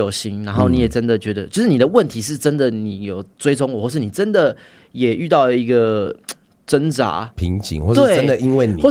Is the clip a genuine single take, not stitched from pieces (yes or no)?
yes